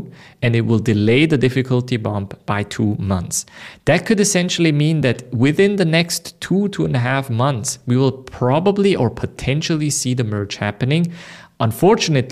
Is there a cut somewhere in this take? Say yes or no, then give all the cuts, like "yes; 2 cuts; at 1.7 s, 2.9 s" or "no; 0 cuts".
no; 0 cuts